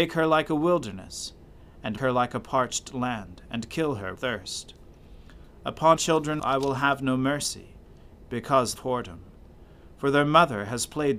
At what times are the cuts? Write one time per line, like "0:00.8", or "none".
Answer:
0:02.0
0:04.2
0:06.0
0:06.4
0:08.8